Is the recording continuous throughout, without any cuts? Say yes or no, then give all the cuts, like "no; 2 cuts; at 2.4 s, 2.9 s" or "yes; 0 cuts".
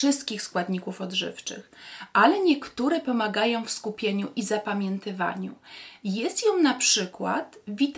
yes; 0 cuts